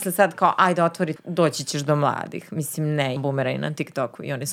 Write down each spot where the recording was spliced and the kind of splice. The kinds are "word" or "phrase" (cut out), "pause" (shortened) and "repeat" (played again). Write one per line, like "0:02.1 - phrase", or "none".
0:01.2 - word
0:03.2 - word